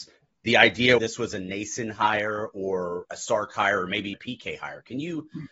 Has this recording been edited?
yes; 3 cuts; at 1.0 s, 3.1 s, 4.1 s

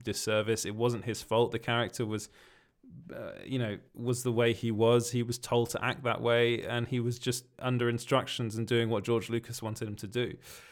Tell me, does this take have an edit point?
yes; 2 cuts; at 3.9 s, 7.5 s

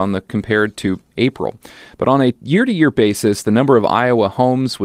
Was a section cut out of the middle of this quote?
no; 0 cuts

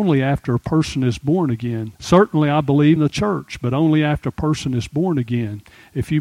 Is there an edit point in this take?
yes; 2 cuts; at 2.0 s, 3.0 s

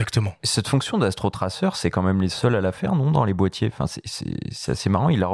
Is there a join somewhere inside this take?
no; 0 cuts

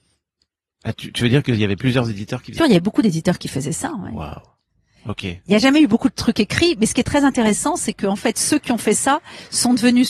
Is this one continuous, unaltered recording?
no; 1 cut; at 2.6 s

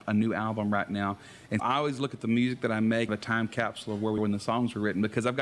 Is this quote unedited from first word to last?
no; 3 cuts; at 1.6 s, 3.1 s, 4.2 s

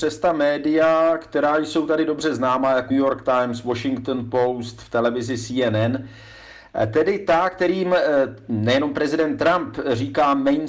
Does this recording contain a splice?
yes; 1 cut; at 2.9 s

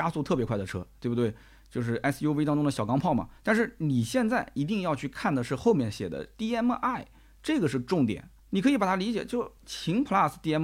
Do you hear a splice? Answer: yes; 3 cuts; at 3.4 s, 8.4 s, 9.6 s

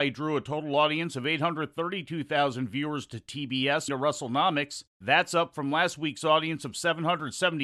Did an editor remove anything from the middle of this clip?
yes; 2 cuts; at 3.9 s, 4.9 s

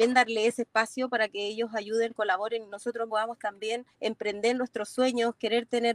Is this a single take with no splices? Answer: no; 2 cuts; at 3.1 s, 3.9 s

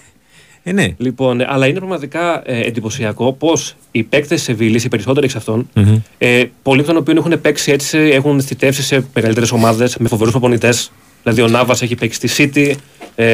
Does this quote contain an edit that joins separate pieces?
no; 0 cuts

